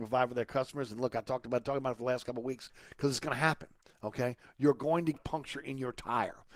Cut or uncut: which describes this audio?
cut